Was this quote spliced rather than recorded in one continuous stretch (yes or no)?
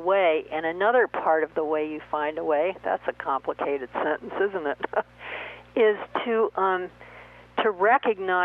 no